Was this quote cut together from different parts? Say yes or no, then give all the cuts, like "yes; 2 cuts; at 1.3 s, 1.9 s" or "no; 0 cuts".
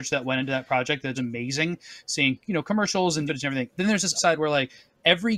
yes; 3 cuts; at 1.1 s, 3.3 s, 4.1 s